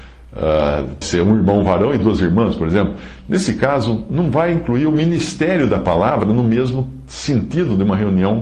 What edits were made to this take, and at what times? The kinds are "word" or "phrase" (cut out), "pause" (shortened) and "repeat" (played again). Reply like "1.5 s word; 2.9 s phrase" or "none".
1.0 s word